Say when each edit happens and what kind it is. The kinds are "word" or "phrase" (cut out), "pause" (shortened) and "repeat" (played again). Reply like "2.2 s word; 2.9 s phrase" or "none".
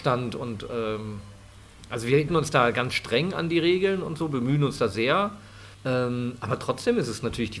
2.3 s phrase; 5.7 s pause